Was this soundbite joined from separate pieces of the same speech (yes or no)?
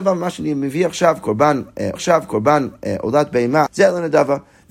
yes